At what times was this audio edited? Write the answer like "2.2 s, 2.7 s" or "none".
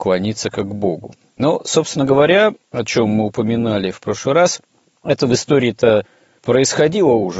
none